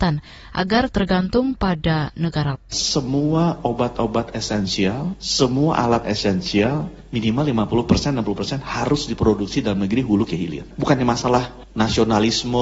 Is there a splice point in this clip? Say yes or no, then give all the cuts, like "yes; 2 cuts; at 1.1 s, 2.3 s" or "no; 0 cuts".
yes; 3 cuts; at 0.9 s, 2.5 s, 6.0 s